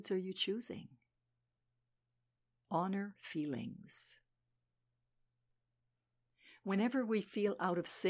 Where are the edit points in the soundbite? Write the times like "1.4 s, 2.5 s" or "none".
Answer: 3.2 s